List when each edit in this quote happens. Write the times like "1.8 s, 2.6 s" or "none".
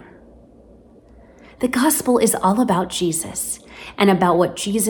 none